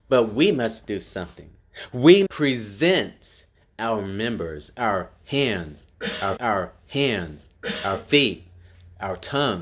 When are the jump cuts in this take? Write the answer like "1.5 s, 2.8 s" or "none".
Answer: 2.3 s, 6.4 s